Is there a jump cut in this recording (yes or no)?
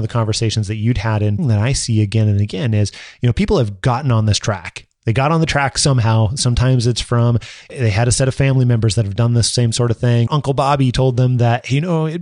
yes